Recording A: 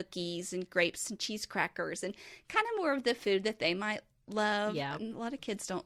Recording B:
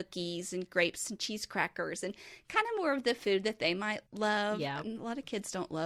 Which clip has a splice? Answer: B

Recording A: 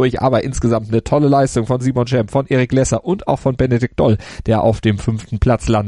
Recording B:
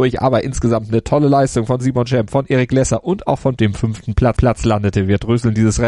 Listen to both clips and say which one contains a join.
B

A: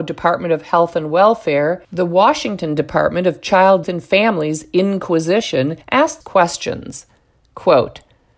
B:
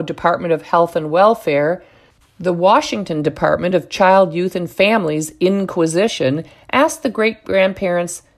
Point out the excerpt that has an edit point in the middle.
A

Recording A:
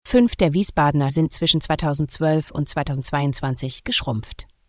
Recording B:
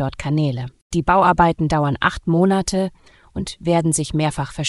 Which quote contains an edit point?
A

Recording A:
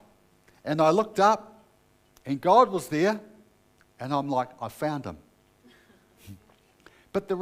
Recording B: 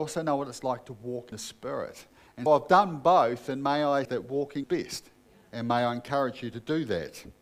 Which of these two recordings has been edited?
B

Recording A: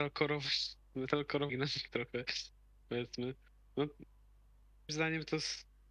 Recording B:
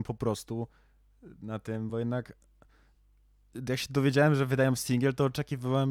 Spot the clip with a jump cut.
A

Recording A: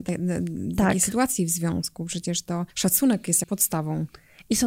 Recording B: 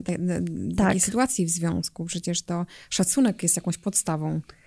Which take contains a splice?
A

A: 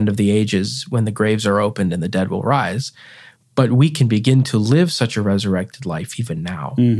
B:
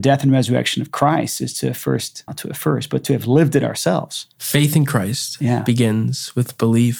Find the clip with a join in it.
B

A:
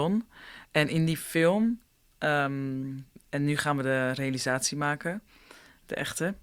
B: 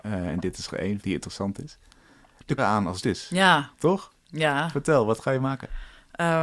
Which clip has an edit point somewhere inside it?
B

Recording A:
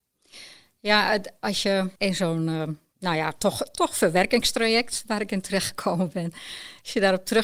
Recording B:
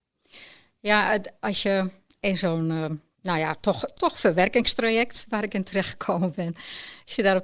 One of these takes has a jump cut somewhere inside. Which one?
A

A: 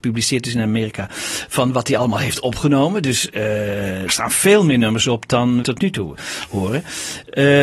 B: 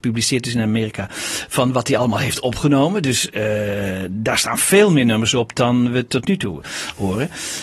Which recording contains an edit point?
A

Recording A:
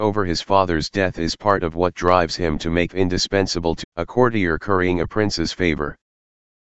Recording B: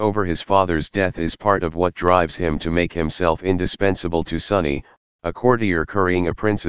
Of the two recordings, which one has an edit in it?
A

